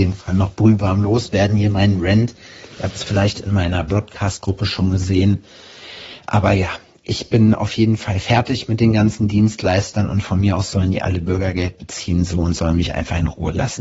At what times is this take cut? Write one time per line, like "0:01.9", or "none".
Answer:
none